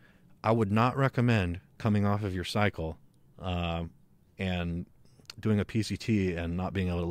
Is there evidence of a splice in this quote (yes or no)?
no